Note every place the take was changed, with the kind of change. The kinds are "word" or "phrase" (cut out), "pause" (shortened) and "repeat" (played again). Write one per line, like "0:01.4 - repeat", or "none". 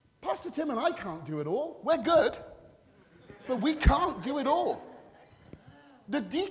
none